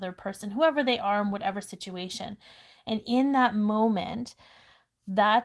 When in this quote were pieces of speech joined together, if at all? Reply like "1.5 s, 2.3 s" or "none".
none